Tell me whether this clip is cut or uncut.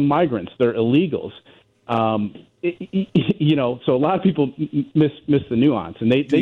uncut